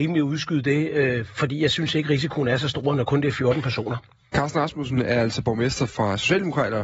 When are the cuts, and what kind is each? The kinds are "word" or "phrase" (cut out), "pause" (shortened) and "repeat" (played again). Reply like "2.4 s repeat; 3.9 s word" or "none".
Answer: none